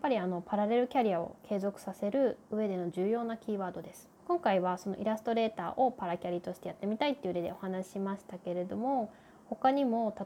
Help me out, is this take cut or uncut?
cut